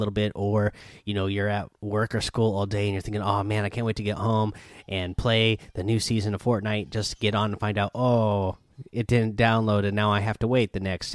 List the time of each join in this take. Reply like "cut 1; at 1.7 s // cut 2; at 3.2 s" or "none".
cut 1; at 1.7 s

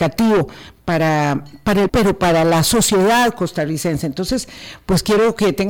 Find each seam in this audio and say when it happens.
cut 1; at 1.9 s

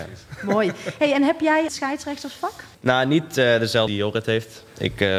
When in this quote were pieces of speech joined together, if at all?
cut 1; at 1.7 s // cut 2; at 2.7 s // cut 3; at 3.9 s

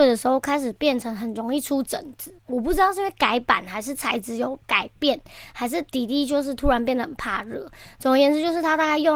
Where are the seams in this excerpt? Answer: cut 1; at 2.4 s // cut 2; at 4.6 s // cut 3; at 5.9 s

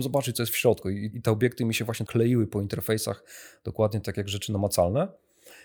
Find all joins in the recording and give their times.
cut 1; at 1.1 s // cut 2; at 2.1 s

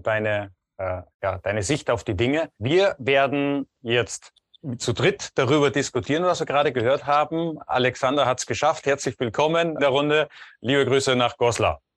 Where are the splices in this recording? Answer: cut 1; at 1.1 s // cut 2; at 2.5 s // cut 3; at 9.8 s

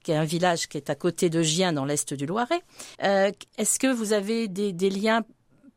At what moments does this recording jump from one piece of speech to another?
cut 1; at 2.9 s

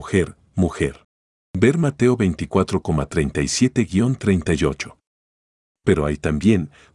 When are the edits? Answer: none

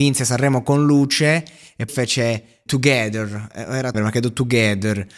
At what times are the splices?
cut 1; at 1.9 s // cut 2; at 2.7 s // cut 3; at 3.9 s

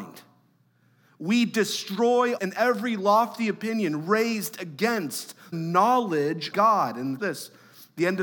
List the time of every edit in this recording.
cut 1; at 2.4 s // cut 2; at 5.5 s // cut 3; at 6.5 s // cut 4; at 7.2 s

